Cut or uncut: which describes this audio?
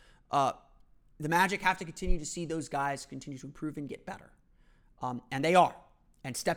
uncut